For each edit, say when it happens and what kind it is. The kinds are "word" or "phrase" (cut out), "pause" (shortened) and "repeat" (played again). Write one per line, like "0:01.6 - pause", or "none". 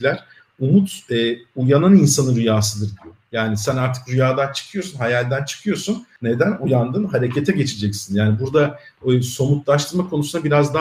0:06.1 - pause

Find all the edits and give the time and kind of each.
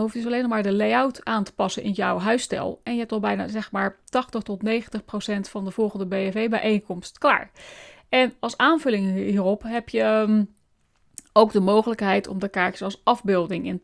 none

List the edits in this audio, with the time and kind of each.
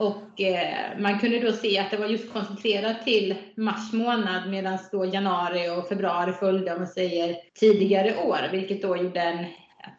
0:07.5 - pause

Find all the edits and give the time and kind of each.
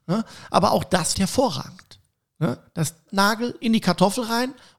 0:01.1 - word
0:03.1 - word

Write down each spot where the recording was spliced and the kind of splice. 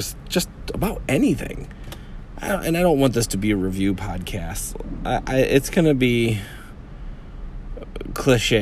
none

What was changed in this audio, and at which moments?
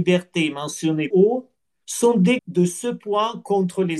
0:01.1 - word
0:02.4 - word

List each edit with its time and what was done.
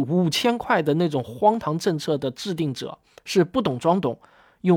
0:03.1 - pause

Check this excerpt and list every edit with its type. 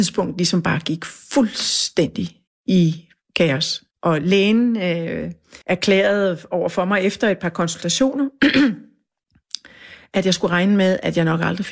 0:02.5 - pause
0:03.9 - pause
0:05.6 - pause

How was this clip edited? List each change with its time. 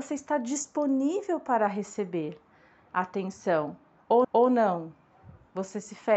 0:04.2 - repeat

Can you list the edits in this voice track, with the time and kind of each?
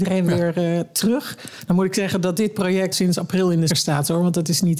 0:02.9 - word
0:03.7 - word

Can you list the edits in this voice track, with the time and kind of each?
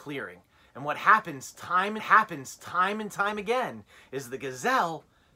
0:02.0 - repeat

